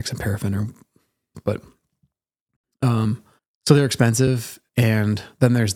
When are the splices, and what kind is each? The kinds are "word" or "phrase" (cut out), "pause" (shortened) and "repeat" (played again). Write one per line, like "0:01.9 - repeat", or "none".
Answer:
0:01.3 - word
0:03.4 - pause
0:04.7 - pause